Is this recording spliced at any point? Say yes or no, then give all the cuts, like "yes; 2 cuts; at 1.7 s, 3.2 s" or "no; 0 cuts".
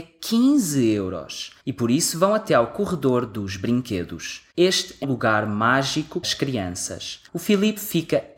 yes; 5 cuts; at 1.6 s, 4.5 s, 5.0 s, 6.2 s, 7.3 s